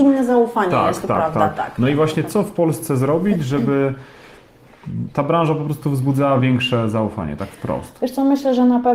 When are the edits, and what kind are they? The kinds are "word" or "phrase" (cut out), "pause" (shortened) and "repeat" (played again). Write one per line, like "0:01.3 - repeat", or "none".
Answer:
none